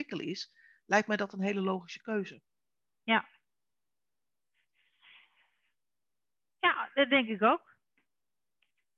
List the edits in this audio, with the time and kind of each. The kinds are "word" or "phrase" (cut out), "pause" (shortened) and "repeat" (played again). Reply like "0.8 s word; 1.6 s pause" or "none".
none